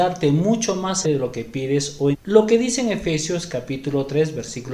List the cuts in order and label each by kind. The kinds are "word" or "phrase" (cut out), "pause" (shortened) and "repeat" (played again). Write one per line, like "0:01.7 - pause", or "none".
0:01.0 - word
0:02.1 - word